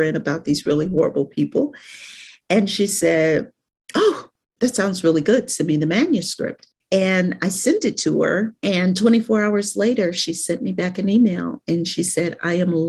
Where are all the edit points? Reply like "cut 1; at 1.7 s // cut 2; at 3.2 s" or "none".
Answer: none

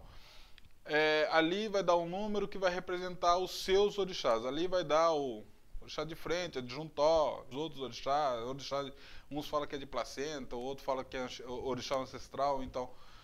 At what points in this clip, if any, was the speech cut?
cut 1; at 7.5 s

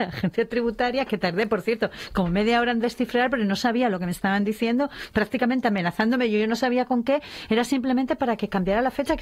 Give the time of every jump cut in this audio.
none

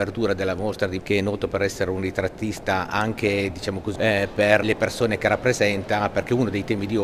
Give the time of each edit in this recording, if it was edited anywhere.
cut 1; at 1.0 s // cut 2; at 4.0 s // cut 3; at 4.6 s

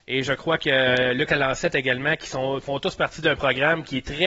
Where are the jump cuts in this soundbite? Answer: none

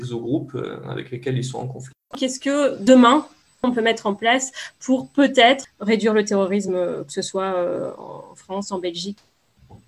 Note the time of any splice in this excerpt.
none

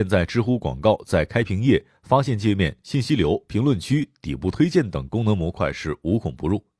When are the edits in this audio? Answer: none

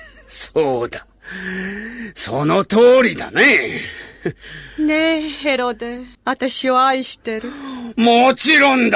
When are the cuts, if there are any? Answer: cut 1; at 6.1 s

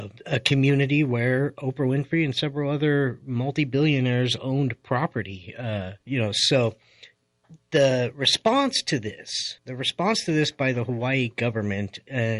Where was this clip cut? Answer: cut 1; at 6.0 s // cut 2; at 9.6 s

